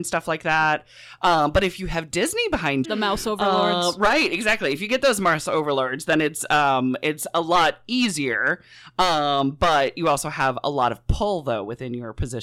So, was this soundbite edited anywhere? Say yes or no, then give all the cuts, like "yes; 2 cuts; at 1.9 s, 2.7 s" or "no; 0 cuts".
yes; 1 cut; at 2.8 s